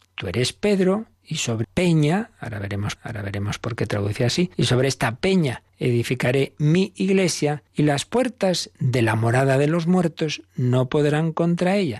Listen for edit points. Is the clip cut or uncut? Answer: cut